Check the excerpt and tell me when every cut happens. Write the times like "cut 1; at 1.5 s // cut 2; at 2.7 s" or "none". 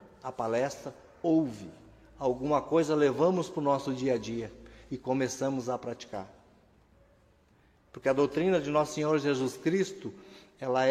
none